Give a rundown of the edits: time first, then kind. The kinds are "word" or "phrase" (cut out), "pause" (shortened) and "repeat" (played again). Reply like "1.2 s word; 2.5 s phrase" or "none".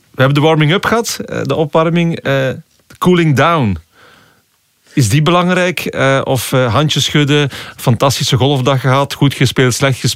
none